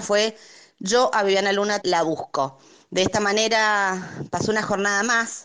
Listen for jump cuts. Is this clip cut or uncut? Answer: cut